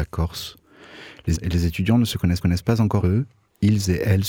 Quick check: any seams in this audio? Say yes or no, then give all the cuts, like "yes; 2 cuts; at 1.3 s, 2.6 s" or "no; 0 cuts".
yes; 3 cuts; at 1.4 s, 2.4 s, 3.0 s